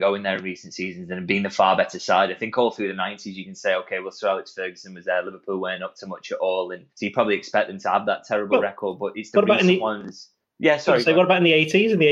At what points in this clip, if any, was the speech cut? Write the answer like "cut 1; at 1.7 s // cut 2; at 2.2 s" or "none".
cut 1; at 6.9 s // cut 2; at 10.4 s